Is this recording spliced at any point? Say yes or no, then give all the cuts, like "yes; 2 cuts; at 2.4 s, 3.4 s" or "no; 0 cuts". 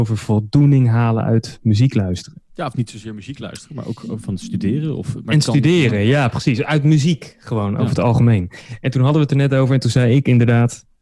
yes; 1 cut; at 2.5 s